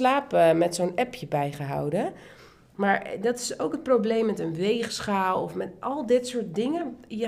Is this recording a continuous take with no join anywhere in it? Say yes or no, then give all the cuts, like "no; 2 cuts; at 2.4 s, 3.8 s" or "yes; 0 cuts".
yes; 0 cuts